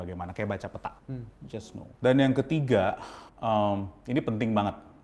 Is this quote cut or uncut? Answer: cut